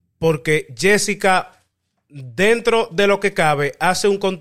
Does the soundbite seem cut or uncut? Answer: uncut